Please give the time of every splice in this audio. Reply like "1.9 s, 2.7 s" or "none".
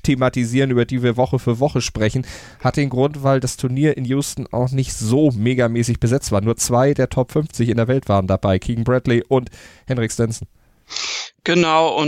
none

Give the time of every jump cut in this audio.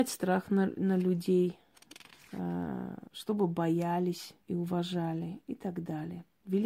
3.1 s, 4.4 s

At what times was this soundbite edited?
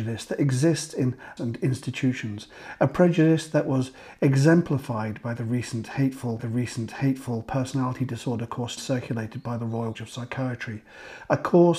1.4 s, 6.4 s, 8.8 s, 9.9 s

